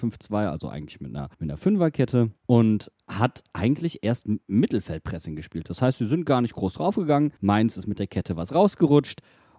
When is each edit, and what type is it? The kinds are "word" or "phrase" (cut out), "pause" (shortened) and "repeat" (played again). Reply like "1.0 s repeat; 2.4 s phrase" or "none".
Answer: 1.3 s pause; 2.4 s pause; 4.4 s pause; 7.4 s pause